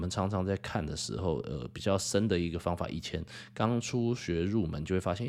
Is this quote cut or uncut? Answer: uncut